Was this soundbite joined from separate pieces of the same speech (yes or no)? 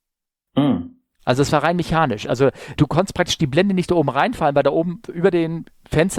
yes